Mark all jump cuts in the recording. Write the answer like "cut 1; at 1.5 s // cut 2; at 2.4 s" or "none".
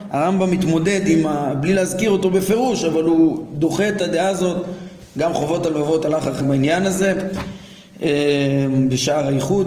cut 1; at 6.4 s